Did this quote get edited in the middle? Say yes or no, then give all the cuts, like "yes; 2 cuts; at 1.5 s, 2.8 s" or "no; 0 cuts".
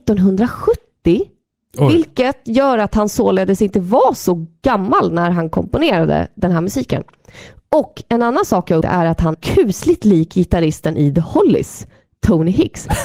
yes; 2 cuts; at 8.8 s, 9.3 s